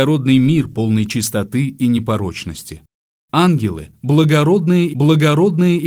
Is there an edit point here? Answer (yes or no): yes